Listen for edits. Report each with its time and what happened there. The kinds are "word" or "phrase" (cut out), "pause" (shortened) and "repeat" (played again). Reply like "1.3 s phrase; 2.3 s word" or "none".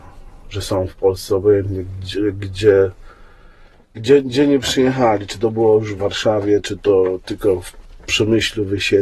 none